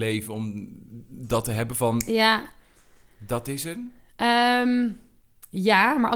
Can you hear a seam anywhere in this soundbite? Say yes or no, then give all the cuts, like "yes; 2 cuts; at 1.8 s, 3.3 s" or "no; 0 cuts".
no; 0 cuts